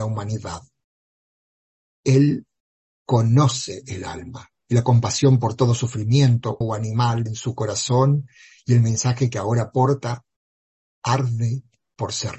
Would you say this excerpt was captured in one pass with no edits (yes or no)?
no